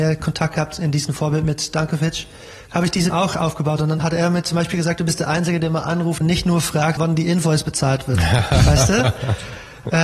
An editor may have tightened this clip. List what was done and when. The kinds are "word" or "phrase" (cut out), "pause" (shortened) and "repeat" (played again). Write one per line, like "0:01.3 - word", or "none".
0:02.7 - word
0:03.1 - word
0:04.0 - word
0:06.2 - word
0:07.0 - word